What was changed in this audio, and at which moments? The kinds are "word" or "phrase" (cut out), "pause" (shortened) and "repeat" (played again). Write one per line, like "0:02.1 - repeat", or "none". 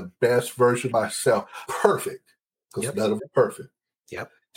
0:00.9 - word
0:01.7 - word
0:03.2 - word

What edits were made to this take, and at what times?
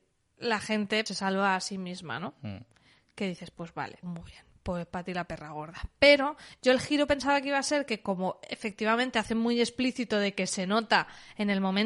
0:01.1 - word
0:04.0 - word

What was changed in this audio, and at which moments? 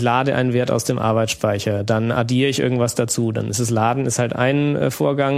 none

